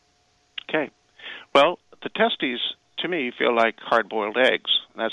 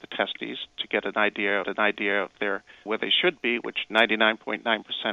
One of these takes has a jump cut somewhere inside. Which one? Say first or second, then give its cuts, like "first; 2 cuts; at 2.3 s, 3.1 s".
second; 2 cuts; at 1.6 s, 2.9 s